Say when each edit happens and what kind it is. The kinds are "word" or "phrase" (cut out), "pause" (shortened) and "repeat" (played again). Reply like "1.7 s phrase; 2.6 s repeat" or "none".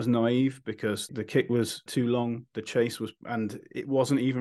3.2 s word